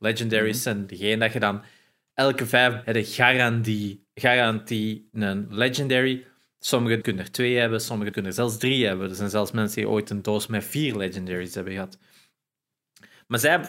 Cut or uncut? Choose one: cut